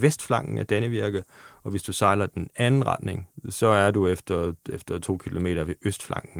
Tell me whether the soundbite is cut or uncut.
uncut